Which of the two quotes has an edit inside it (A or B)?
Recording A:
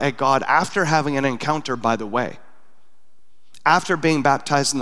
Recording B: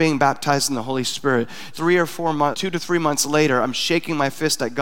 B